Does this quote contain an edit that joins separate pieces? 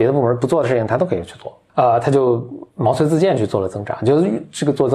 yes; 1 cut; at 2.7 s

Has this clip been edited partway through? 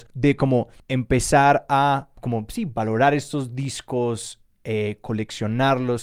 no; 0 cuts

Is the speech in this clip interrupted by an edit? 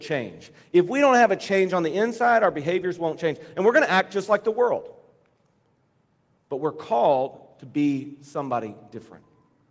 no; 0 cuts

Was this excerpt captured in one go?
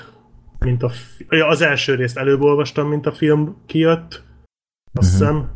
no; 1 cut; at 4.5 s

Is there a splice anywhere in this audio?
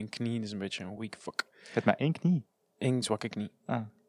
no; 0 cuts

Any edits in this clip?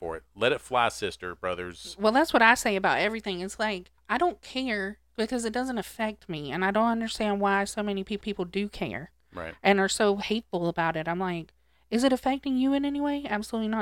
yes; 2 cuts; at 4.0 s, 8.2 s

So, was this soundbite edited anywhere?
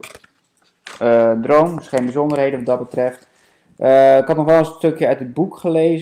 no; 0 cuts

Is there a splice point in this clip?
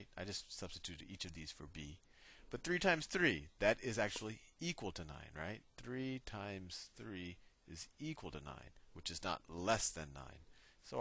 no; 0 cuts

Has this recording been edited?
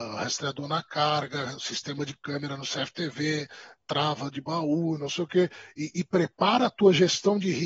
no; 0 cuts

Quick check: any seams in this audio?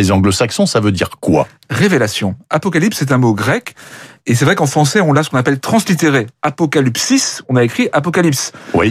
no; 0 cuts

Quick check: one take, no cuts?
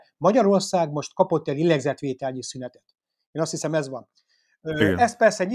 yes; 0 cuts

